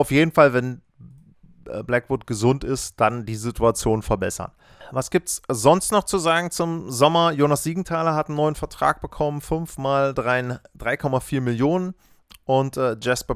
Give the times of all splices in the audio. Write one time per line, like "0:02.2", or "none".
none